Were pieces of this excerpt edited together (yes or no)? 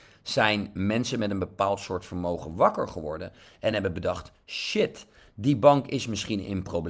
no